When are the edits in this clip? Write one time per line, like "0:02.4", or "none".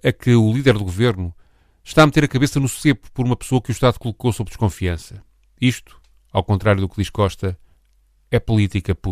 none

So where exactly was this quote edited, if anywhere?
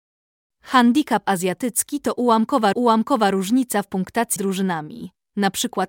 0:02.7
0:04.4

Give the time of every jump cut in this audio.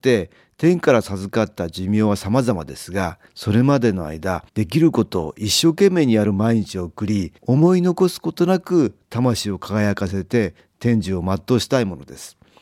0:03.3
0:04.5
0:07.4

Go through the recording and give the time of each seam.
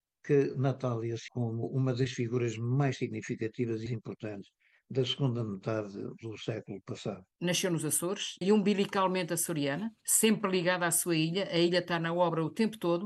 0:01.3
0:03.9
0:08.4
0:10.0

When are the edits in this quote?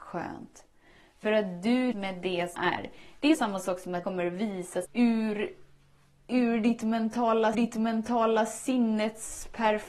0:01.9
0:02.5
0:03.3
0:04.0
0:04.8
0:07.5

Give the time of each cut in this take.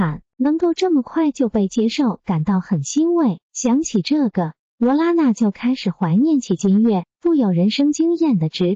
0:03.4

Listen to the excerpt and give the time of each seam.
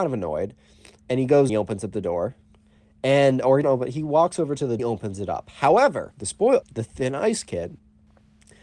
0:01.5
0:03.6
0:04.8
0:06.1
0:06.6

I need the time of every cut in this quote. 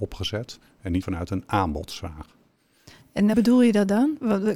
0:01.0
0:03.3

